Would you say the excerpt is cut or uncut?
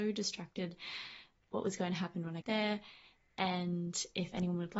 cut